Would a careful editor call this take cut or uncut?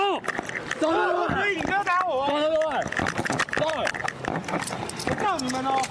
cut